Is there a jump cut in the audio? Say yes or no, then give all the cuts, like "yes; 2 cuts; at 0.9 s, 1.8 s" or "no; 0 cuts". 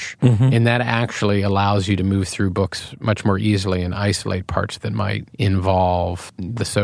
no; 0 cuts